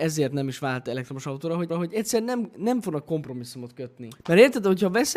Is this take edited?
yes; 2 cuts; at 1.7 s, 4.2 s

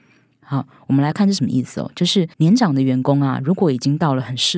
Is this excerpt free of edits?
no; 1 cut; at 2.3 s

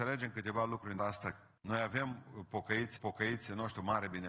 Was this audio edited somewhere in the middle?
yes; 3 cuts; at 1.0 s, 1.6 s, 3.0 s

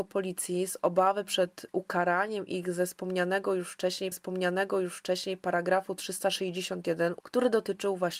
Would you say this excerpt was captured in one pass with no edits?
no; 3 cuts; at 1.7 s, 4.1 s, 7.2 s

